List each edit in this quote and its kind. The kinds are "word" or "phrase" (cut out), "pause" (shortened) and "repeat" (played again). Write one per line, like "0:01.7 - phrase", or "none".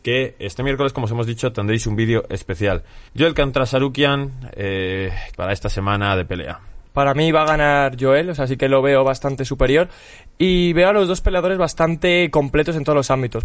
0:03.1 - pause
0:05.3 - phrase
0:06.9 - pause